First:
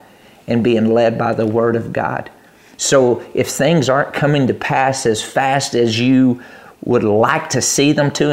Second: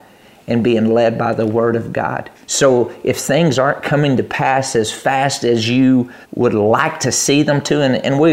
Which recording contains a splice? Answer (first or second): second